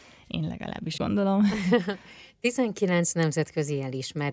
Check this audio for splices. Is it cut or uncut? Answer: cut